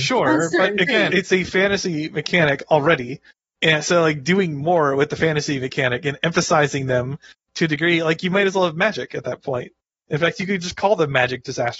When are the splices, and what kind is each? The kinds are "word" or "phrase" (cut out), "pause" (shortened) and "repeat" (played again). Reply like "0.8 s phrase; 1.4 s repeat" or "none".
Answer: 1.1 s word